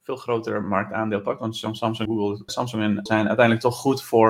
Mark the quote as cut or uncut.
cut